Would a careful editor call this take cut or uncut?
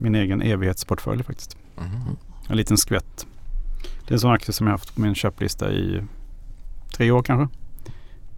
uncut